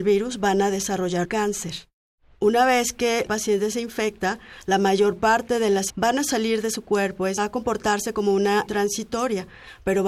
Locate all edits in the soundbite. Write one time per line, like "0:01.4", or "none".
0:01.2
0:03.3
0:05.9
0:07.4
0:08.7